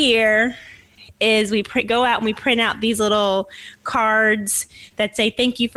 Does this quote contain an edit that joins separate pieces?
no; 0 cuts

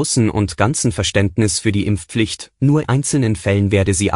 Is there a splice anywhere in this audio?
yes; 1 cut; at 2.8 s

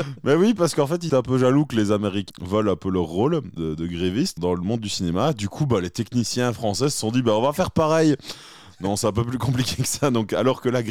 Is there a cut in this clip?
yes; 4 cuts; at 1.1 s, 2.3 s, 3.6 s, 4.4 s

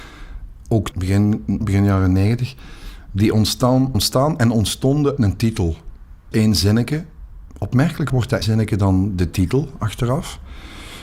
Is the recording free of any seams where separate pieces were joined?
no; 7 cuts; at 0.9 s, 1.6 s, 3.9 s, 5.2 s, 6.3 s, 8.1 s, 8.4 s

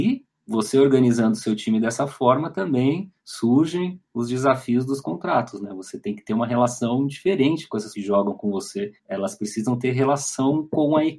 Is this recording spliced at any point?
yes; 3 cuts; at 3.2 s, 7.9 s, 9.0 s

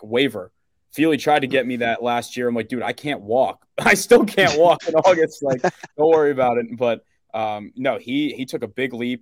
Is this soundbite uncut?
no; 1 cut; at 5.9 s

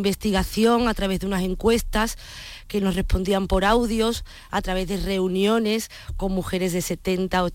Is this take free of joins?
yes; 0 cuts

